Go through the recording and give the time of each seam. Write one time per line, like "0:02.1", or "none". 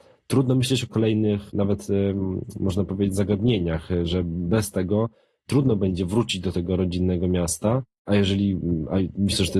none